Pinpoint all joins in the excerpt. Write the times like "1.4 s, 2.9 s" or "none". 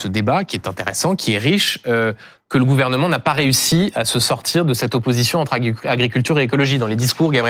none

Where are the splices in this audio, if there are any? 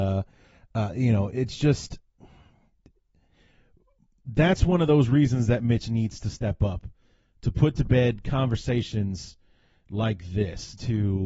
none

